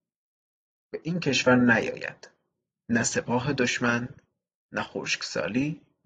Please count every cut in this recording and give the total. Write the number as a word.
zero